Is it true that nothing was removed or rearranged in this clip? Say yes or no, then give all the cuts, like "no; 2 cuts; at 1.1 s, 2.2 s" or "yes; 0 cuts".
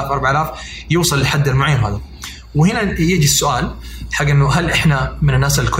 yes; 0 cuts